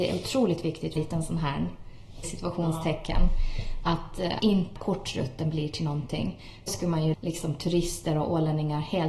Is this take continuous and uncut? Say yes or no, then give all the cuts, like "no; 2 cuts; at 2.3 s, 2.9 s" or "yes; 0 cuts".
no; 6 cuts; at 1.0 s, 2.2 s, 4.4 s, 4.8 s, 6.7 s, 7.1 s